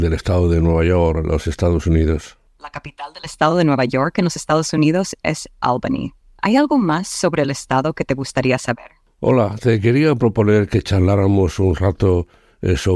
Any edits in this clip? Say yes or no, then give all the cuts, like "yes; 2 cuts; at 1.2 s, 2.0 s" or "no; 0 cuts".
no; 0 cuts